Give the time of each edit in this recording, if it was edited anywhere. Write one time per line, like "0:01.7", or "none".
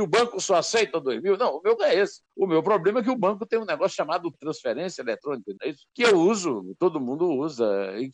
0:01.8
0:02.3
0:04.3
0:05.6
0:05.9